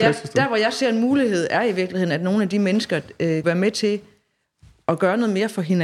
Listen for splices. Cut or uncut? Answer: cut